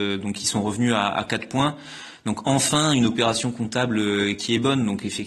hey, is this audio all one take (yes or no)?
yes